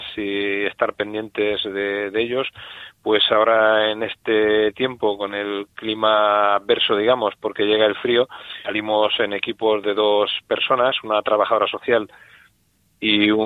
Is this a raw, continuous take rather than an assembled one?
no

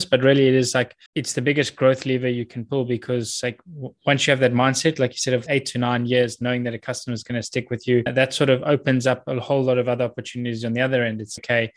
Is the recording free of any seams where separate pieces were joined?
no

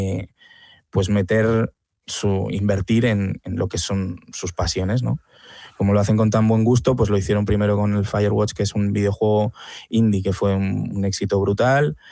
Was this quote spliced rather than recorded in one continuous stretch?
no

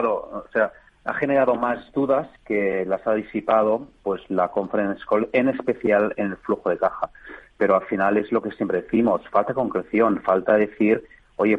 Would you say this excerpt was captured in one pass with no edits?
no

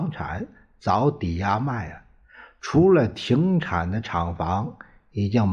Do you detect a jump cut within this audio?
no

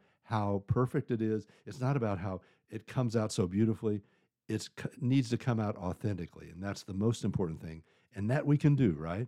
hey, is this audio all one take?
yes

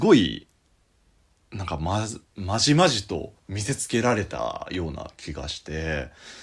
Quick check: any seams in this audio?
yes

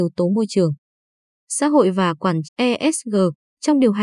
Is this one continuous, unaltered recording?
no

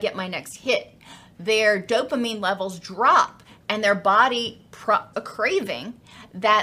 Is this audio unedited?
no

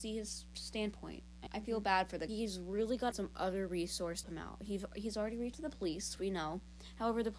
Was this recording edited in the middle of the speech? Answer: yes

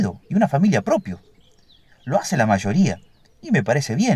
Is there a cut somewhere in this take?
no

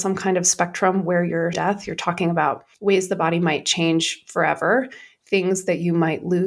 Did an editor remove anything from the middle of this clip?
yes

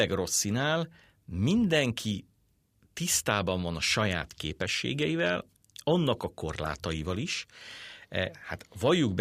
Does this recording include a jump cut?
no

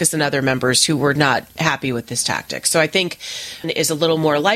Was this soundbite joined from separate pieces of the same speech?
yes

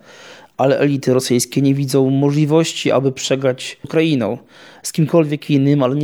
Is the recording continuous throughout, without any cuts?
no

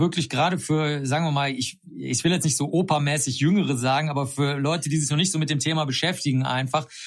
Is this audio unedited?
yes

